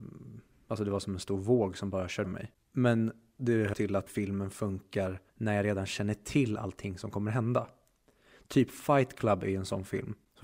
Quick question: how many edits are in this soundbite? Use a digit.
4